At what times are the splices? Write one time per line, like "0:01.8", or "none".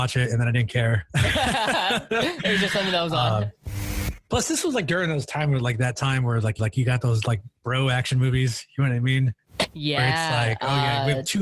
0:06.6